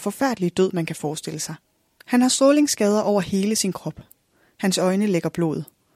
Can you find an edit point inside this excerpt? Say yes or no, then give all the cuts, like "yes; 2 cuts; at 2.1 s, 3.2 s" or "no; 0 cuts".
no; 0 cuts